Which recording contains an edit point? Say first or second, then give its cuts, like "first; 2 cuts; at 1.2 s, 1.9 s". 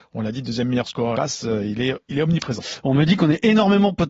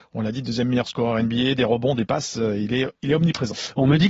first; 1 cut; at 1.1 s